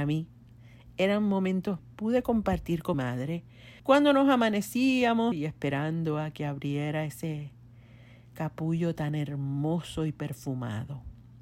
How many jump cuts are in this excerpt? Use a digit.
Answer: 4